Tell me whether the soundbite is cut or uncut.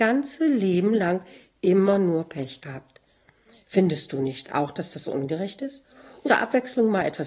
cut